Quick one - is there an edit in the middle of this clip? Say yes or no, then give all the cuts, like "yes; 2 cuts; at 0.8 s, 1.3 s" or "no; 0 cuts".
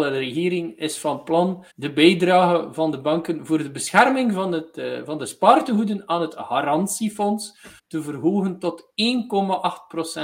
yes; 2 cuts; at 1.7 s, 7.8 s